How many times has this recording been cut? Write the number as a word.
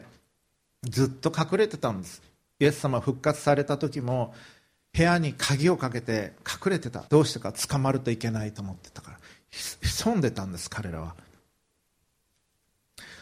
one